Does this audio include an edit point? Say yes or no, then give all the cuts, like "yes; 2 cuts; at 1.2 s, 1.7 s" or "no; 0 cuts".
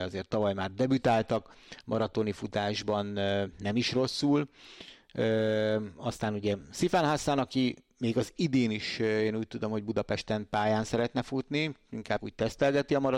yes; 1 cut; at 12.2 s